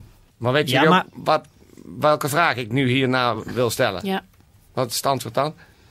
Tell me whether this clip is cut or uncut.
uncut